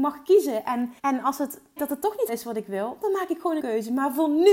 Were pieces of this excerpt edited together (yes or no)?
yes